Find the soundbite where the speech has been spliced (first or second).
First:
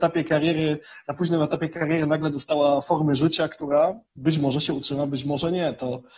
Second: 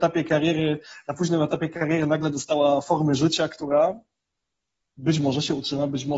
first